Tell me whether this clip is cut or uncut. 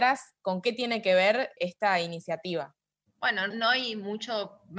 cut